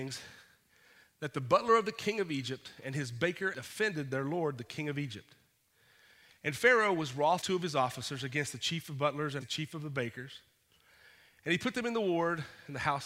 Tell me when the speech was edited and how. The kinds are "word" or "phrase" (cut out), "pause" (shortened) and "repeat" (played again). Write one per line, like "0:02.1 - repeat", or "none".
0:03.5 - word
0:07.4 - word
0:09.4 - word

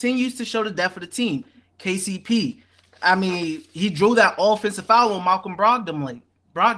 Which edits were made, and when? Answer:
none

